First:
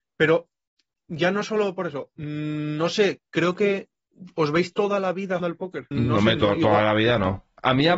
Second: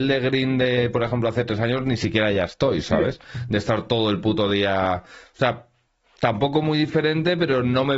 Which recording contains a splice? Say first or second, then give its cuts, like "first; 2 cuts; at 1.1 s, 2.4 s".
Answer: first; 2 cuts; at 5.4 s, 5.9 s